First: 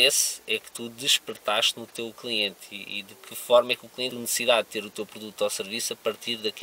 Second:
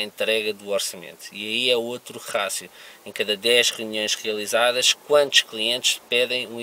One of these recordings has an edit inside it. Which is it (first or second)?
first